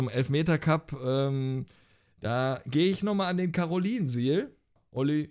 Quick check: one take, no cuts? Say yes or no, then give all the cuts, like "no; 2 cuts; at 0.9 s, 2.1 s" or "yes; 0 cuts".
yes; 0 cuts